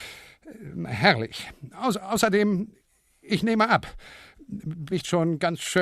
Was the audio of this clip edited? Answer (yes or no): yes